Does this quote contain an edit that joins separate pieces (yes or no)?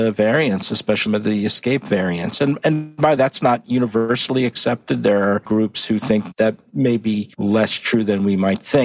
yes